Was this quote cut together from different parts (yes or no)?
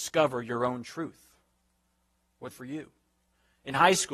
yes